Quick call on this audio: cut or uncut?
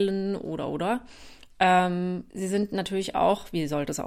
cut